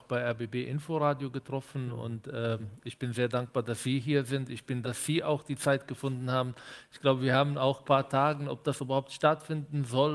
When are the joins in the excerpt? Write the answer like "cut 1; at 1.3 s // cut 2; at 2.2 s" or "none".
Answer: cut 1; at 4.8 s // cut 2; at 7.8 s